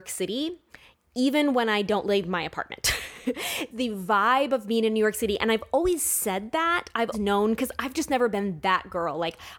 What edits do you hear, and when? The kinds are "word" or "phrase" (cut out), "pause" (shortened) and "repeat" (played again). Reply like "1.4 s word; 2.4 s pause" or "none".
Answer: 3.7 s word; 7.1 s word

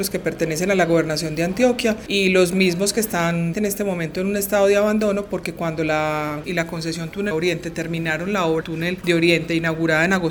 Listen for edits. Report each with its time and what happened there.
3.5 s word; 6.4 s word; 7.3 s word; 8.6 s word

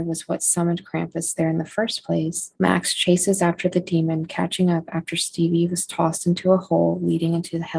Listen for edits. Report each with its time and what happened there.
2.5 s pause

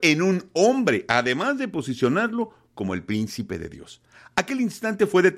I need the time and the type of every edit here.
none

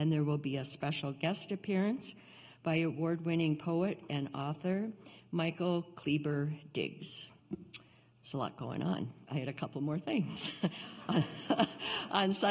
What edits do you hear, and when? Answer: 7.4 s pause

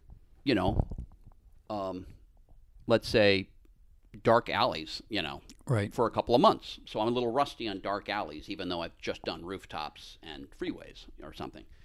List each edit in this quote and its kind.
2.5 s pause

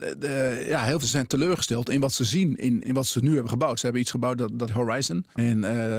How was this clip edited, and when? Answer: 1.0 s word; 2.8 s word; 4.7 s word

